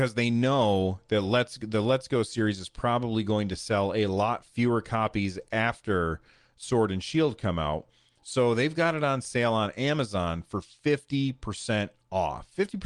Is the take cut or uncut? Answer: uncut